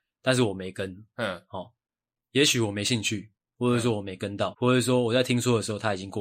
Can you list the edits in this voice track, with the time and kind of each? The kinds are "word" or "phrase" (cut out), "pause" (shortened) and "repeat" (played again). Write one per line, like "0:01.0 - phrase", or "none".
0:04.5 - word

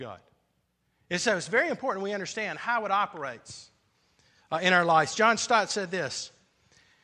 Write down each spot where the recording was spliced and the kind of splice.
none

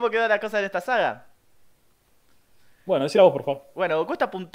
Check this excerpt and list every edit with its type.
none

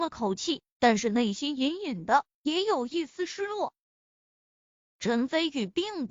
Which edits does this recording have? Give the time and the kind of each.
none

